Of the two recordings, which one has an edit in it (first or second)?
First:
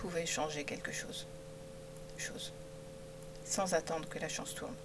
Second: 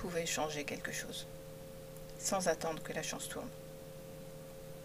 first